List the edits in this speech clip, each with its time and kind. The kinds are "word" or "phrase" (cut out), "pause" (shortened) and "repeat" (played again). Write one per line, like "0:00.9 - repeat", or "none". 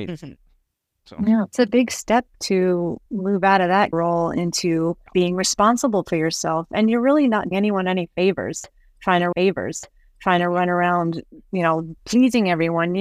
0:03.1 - pause
0:03.9 - word
0:05.1 - pause
0:07.5 - word
0:09.3 - repeat
0:12.0 - pause